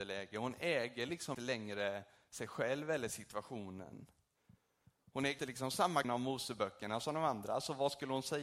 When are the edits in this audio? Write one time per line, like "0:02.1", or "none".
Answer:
0:01.3
0:05.4
0:06.0

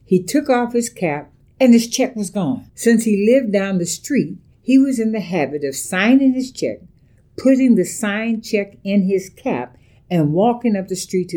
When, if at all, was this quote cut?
0:02.7

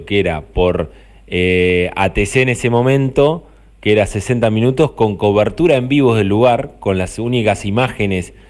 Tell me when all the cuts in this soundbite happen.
none

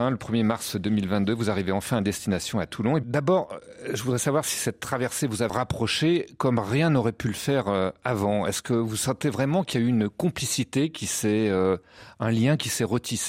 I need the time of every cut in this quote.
0:05.5

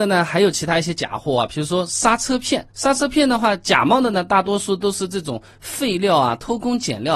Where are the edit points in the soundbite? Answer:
0:02.7

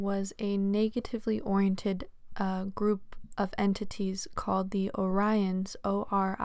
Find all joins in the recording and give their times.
none

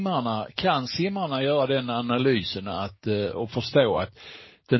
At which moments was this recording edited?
none

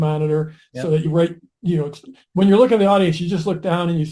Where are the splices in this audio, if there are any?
0:01.0

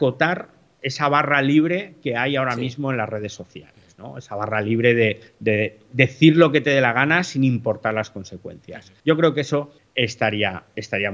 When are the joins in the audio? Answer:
0:05.3
0:09.0
0:09.8

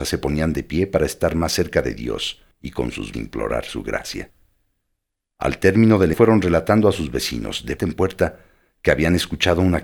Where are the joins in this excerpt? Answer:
0:02.5
0:03.1
0:06.1
0:07.8

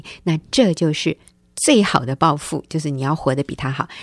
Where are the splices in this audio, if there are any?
none

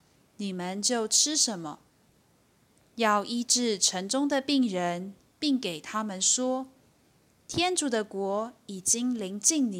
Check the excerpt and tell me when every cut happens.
none

